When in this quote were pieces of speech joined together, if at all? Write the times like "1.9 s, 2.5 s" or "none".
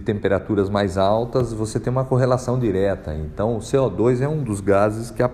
none